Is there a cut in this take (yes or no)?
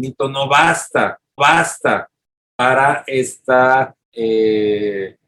yes